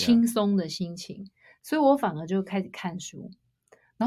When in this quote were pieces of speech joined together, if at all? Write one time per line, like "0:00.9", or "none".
none